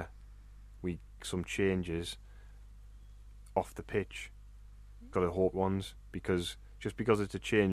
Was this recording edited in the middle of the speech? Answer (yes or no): yes